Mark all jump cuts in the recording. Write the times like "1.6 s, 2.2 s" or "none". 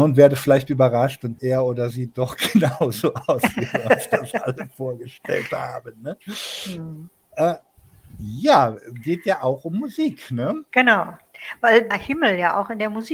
1.4 s, 1.9 s, 11.9 s